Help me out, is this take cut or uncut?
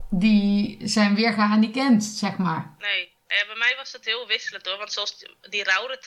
cut